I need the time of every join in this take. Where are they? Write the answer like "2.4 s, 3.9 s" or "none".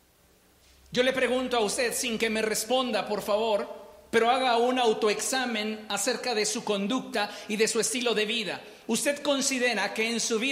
none